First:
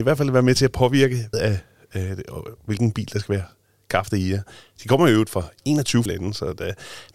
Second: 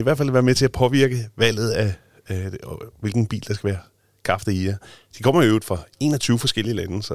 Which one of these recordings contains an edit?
first; 2 cuts; at 1.3 s, 6.1 s

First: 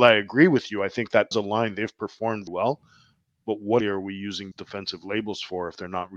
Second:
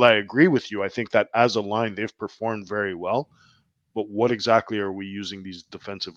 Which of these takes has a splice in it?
first; 4 cuts; at 1.3 s, 2.5 s, 3.8 s, 4.5 s

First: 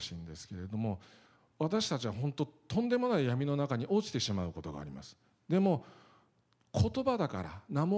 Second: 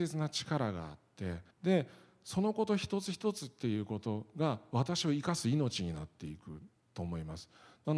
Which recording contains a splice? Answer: second; 1 cut; at 1.5 s

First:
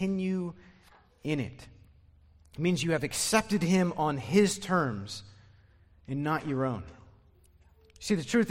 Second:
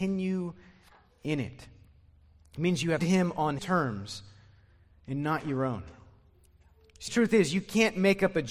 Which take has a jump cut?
second; 3 cuts; at 3.0 s, 3.6 s, 7.1 s

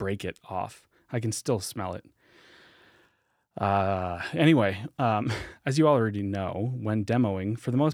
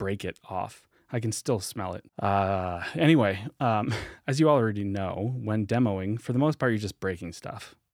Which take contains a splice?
second; 1 cut; at 2.1 s

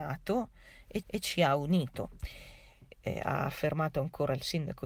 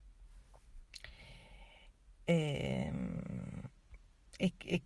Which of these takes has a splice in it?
first; 2 cuts; at 1.0 s, 2.9 s

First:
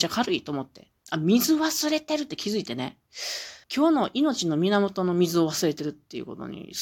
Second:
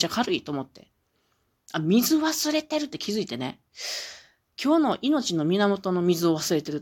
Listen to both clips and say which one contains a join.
first; 2 cuts; at 1.0 s, 3.6 s

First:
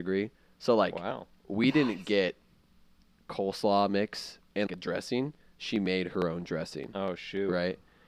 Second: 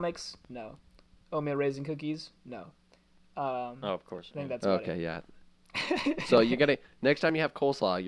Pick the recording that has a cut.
first; 1 cut; at 4.7 s

